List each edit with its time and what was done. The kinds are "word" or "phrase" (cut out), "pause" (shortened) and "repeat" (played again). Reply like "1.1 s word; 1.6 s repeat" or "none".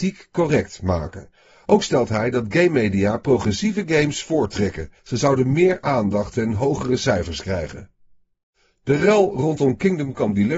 5.0 s pause